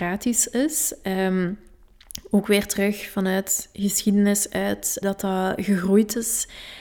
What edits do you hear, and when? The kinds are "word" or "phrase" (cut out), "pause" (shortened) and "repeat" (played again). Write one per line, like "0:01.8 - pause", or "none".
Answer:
0:05.0 - word